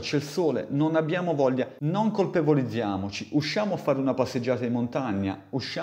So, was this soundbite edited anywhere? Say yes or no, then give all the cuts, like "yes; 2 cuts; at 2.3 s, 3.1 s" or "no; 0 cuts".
no; 0 cuts